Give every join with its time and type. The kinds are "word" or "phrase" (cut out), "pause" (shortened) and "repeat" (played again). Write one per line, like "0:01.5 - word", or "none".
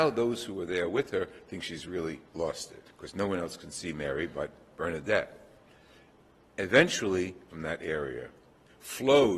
0:02.3 - pause
0:02.9 - pause
0:07.5 - phrase